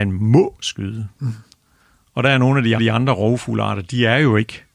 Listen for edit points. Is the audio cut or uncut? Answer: cut